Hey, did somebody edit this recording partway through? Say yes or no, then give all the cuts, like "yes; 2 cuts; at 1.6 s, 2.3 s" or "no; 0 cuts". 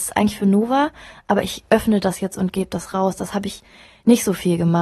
no; 0 cuts